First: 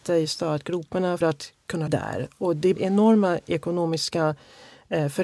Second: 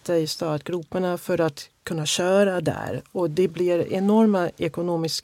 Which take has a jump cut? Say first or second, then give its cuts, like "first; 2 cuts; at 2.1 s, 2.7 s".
first; 3 cuts; at 1.2 s, 1.9 s, 2.8 s